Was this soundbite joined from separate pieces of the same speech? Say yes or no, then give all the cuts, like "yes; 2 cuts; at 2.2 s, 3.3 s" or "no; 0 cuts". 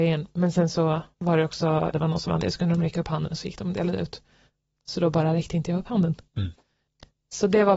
yes; 2 cuts; at 1.9 s, 2.4 s